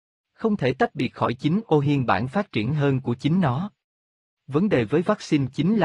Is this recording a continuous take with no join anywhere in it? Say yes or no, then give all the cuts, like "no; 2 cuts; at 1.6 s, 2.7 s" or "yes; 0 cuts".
yes; 0 cuts